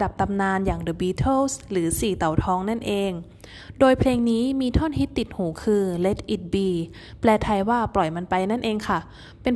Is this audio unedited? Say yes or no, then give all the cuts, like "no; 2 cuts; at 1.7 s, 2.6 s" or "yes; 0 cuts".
yes; 0 cuts